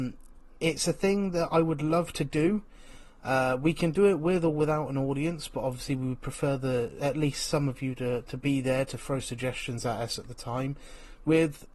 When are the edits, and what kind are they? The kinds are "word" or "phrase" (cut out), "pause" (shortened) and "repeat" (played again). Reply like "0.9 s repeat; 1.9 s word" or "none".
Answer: none